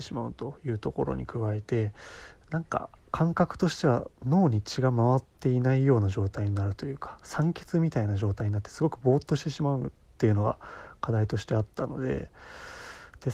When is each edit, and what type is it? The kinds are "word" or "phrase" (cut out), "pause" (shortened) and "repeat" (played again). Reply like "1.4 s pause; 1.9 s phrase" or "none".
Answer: 4.2 s pause